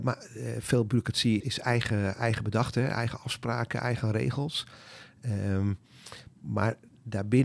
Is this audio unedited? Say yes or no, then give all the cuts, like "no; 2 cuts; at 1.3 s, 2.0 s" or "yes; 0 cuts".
no; 1 cut; at 1.4 s